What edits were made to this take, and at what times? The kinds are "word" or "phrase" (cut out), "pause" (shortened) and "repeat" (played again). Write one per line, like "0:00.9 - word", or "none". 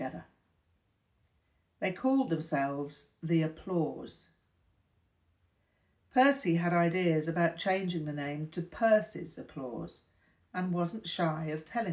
none